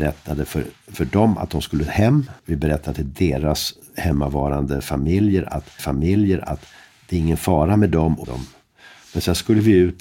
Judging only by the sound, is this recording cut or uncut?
cut